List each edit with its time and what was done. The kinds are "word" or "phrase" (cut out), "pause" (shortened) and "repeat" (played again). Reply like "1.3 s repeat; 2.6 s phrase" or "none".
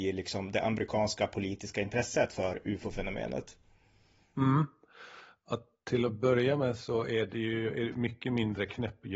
none